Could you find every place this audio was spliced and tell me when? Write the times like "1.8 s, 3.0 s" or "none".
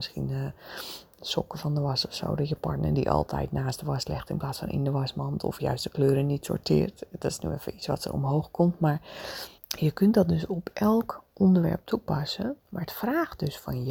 9.6 s, 12.6 s